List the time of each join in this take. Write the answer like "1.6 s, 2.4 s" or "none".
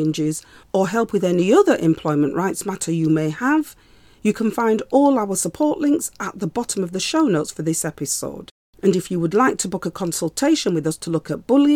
none